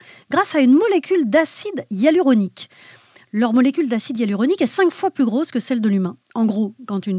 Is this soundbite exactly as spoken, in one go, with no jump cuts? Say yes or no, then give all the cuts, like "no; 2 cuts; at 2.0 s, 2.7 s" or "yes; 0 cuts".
yes; 0 cuts